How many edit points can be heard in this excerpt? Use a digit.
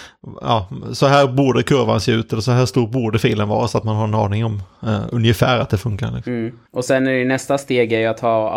1